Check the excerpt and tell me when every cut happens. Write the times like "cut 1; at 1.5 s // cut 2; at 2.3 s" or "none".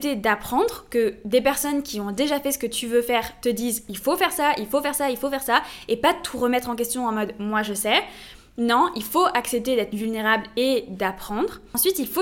none